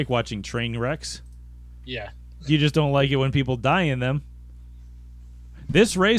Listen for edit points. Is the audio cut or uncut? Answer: uncut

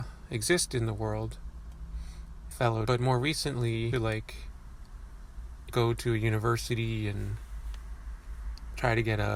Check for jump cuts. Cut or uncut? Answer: cut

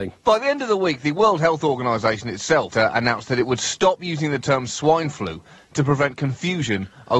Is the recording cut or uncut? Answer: cut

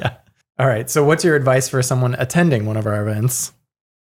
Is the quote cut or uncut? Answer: uncut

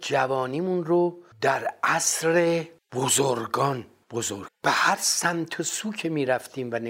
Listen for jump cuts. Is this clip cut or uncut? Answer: cut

